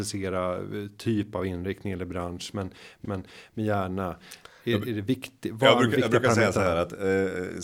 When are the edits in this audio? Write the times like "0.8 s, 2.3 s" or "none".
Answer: 3.0 s

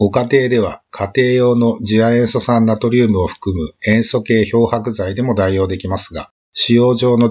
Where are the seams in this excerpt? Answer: 6.4 s

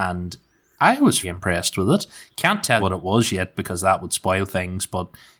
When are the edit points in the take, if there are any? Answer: 1.2 s, 2.8 s

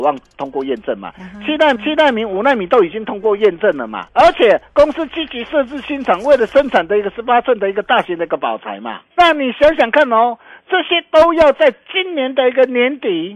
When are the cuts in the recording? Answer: 1.8 s, 4.1 s, 9.1 s

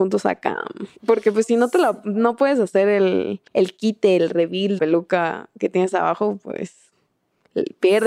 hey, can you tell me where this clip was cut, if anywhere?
0.9 s, 3.5 s, 4.8 s

